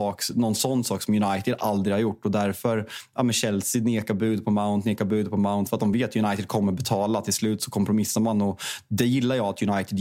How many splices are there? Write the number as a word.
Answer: zero